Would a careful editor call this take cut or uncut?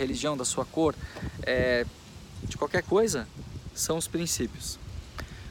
uncut